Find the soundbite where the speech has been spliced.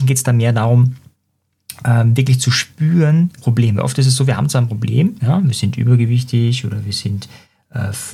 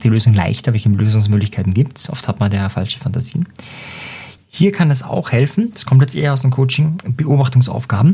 first; 1 cut; at 3.4 s

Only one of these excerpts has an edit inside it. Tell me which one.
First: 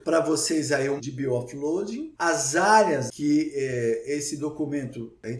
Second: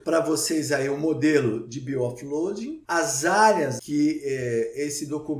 first; 1 cut; at 1.0 s

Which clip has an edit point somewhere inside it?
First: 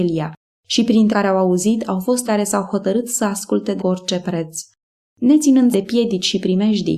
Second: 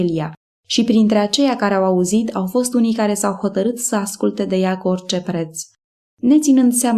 first; 4 cuts; at 1.1 s, 2.3 s, 3.8 s, 5.7 s

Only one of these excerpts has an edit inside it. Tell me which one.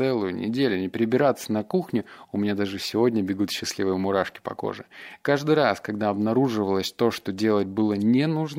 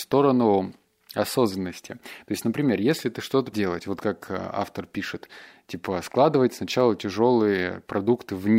second; 1 cut; at 3.5 s

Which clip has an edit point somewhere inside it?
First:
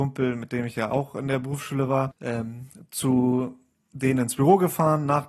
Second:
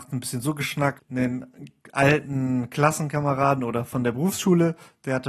first; 1 cut; at 3.8 s

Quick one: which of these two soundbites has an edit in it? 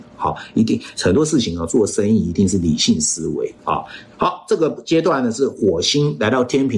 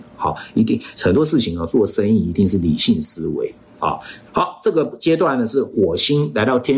first; 1 cut; at 3.6 s

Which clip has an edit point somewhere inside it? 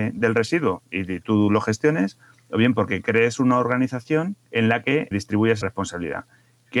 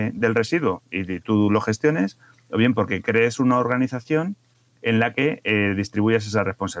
first; 3 cuts; at 4.4 s, 5.1 s, 5.6 s

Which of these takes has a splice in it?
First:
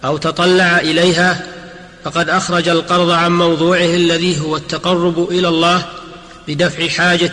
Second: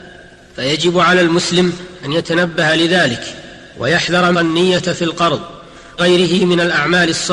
second; 2 cuts; at 4.3 s, 6.0 s

